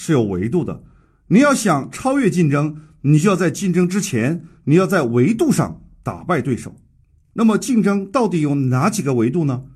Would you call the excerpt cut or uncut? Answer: uncut